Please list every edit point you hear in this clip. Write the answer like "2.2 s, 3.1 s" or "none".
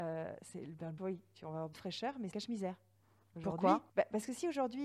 1.0 s, 1.7 s, 2.3 s, 3.9 s